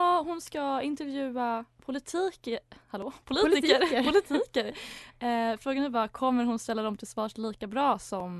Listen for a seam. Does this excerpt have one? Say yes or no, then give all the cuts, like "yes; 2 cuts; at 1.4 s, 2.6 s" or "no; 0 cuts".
no; 0 cuts